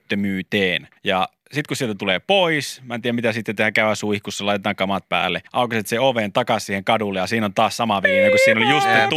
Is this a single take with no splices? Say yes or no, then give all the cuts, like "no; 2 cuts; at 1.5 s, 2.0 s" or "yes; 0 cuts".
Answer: no; 2 cuts; at 1.0 s, 5.5 s